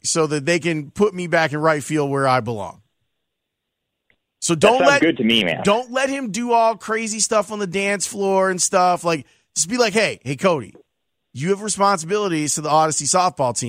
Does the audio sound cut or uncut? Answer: uncut